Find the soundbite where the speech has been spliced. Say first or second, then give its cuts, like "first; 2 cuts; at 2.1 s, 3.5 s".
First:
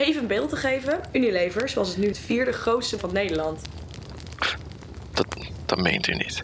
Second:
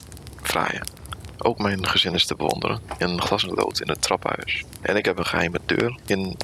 first; 2 cuts; at 2.1 s, 3.0 s